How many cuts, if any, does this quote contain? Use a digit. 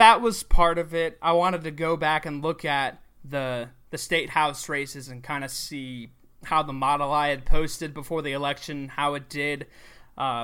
0